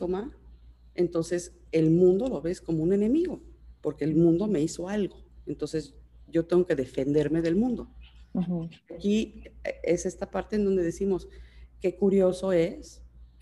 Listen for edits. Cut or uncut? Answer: cut